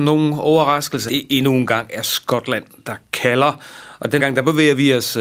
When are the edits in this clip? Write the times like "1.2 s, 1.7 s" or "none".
1.1 s, 4.2 s